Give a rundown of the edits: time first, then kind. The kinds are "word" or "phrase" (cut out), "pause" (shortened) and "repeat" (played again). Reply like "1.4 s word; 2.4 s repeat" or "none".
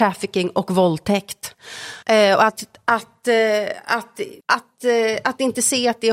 2.0 s pause; 4.4 s pause